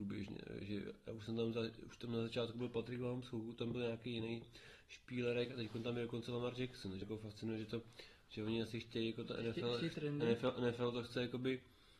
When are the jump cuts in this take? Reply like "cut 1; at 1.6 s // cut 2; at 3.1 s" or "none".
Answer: cut 1; at 7.0 s